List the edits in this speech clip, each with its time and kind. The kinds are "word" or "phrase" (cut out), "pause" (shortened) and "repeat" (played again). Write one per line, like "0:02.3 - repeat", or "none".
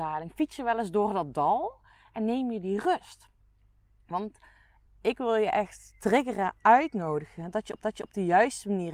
0:07.8 - repeat

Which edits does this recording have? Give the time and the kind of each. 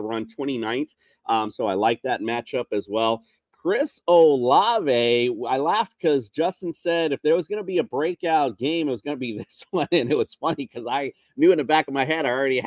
none

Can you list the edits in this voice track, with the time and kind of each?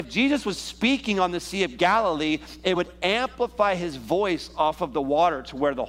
none

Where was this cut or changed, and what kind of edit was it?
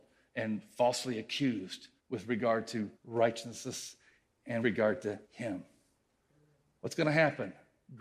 0:02.0 - pause
0:03.0 - pause
0:04.6 - word
0:05.2 - pause

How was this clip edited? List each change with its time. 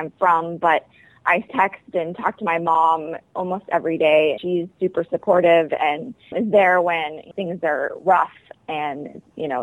0:01.5 - word
0:04.4 - word
0:06.3 - word
0:07.3 - word

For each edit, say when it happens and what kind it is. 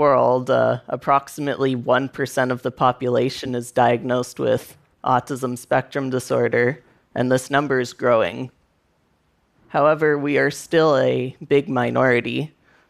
none

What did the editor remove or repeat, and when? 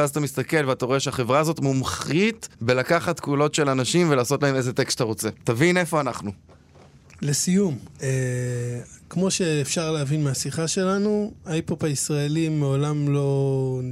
0:02.5 - pause
0:05.4 - pause
0:07.9 - pause

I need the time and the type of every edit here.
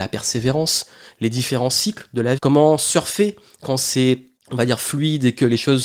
0:02.4 - word
0:04.4 - pause

